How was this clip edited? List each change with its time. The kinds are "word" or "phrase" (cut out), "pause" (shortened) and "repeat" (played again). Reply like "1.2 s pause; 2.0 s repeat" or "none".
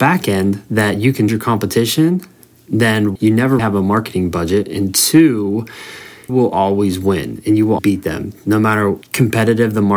1.3 s word; 3.2 s word; 3.6 s word; 6.3 s word; 7.8 s word; 9.0 s word

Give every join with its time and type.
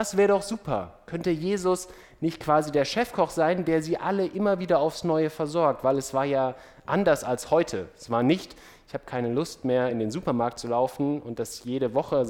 none

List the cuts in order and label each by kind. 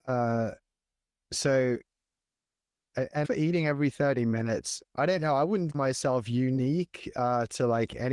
3.2 s word; 4.8 s word; 5.7 s word

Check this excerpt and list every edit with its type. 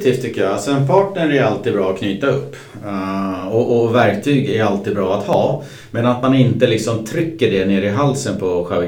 none

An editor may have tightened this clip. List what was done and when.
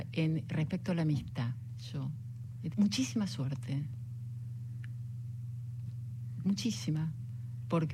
2.7 s word

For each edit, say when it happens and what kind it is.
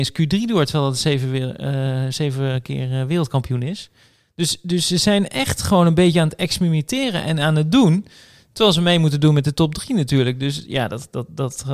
none

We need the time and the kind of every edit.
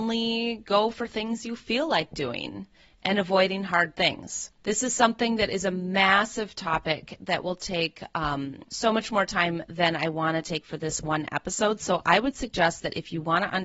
4.6 s pause; 8.7 s pause

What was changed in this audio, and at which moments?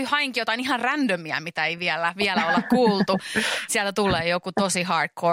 none

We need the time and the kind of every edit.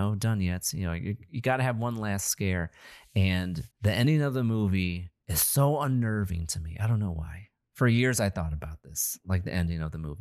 3.7 s pause; 5.2 s pause

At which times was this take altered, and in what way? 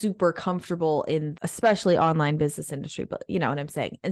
1.4 s word

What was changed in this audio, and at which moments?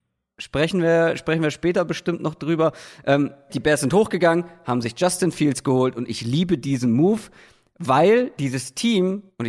3.5 s word

